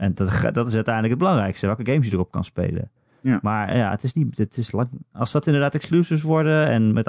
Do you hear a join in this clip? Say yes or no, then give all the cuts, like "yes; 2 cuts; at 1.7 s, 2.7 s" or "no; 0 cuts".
no; 0 cuts